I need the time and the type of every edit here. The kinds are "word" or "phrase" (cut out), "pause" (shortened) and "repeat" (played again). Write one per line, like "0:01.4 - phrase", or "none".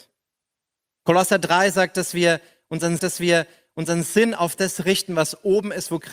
0:03.0 - repeat